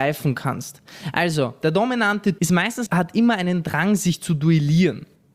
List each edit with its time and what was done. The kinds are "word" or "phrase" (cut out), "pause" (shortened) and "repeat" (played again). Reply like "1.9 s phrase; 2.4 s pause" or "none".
2.4 s word; 2.9 s phrase

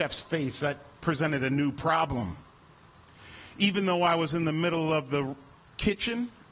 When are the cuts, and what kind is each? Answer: none

